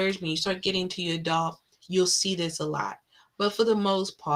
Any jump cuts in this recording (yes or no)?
no